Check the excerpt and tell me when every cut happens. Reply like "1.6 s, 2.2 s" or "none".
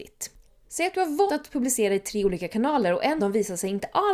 1.3 s, 3.2 s